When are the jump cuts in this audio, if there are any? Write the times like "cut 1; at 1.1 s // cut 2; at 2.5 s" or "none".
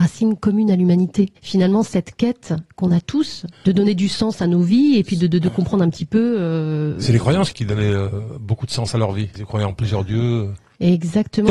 cut 1; at 1.4 s